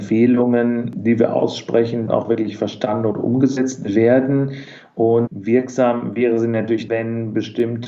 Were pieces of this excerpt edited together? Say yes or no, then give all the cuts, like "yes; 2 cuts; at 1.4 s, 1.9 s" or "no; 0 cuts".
yes; 3 cuts; at 2.1 s, 5.3 s, 6.9 s